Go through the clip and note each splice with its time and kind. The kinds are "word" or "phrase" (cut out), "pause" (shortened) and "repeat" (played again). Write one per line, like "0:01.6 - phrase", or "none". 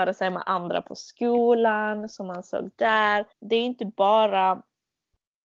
0:03.3 - pause